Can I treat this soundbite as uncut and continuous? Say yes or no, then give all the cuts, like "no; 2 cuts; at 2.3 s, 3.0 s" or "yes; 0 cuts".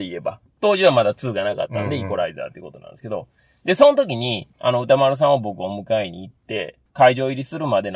yes; 0 cuts